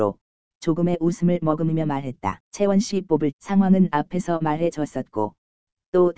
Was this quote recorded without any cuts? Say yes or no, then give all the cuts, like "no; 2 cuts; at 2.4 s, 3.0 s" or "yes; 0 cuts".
no; 2 cuts; at 2.5 s, 3.3 s